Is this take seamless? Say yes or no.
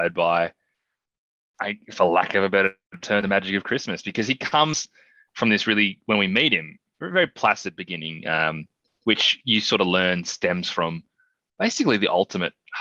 yes